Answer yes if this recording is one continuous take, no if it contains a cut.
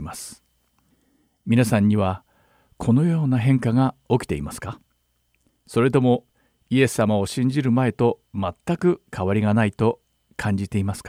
yes